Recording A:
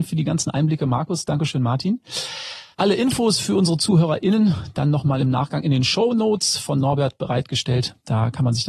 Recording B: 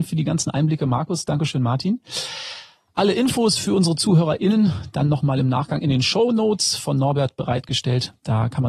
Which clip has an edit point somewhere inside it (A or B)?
A